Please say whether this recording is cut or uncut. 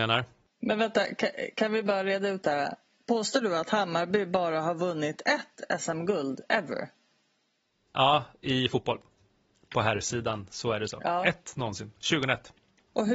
uncut